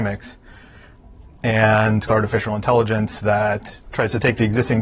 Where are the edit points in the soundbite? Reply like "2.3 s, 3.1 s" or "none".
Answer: 2.1 s, 3.8 s